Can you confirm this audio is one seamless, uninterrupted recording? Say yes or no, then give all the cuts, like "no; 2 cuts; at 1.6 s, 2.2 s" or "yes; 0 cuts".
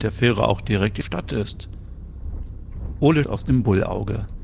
no; 2 cuts; at 1.0 s, 3.2 s